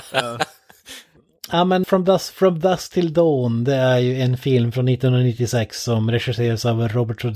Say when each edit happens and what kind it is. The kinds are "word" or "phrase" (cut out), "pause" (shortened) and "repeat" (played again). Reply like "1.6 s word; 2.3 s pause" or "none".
1.8 s word